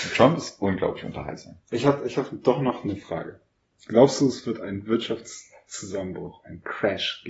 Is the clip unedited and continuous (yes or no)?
yes